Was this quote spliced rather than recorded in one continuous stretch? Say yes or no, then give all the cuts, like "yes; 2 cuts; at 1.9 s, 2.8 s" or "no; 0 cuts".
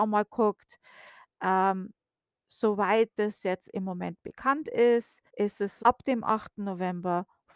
yes; 2 cuts; at 5.3 s, 5.8 s